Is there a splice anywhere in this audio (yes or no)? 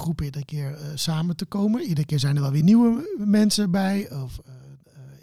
no